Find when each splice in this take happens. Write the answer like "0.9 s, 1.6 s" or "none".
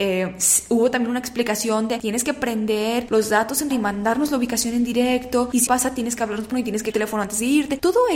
3.7 s, 5.7 s, 6.5 s, 6.9 s